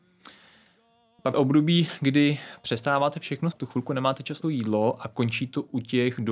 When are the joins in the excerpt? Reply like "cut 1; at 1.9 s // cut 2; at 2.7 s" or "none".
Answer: cut 1; at 1.3 s // cut 2; at 3.5 s // cut 3; at 4.4 s